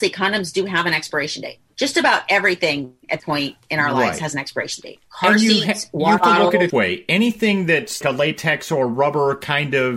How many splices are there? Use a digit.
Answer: 4